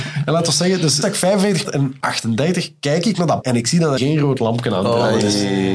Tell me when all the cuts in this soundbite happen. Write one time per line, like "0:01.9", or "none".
0:01.0
0:01.6
0:02.0
0:03.4
0:04.0